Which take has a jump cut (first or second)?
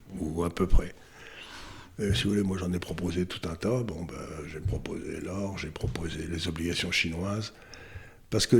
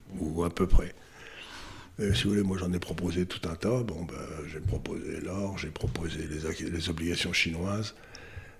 first